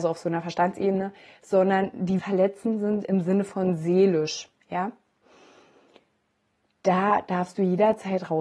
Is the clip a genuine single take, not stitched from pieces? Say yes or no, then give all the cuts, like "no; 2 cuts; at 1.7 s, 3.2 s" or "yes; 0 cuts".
no; 1 cut; at 2.2 s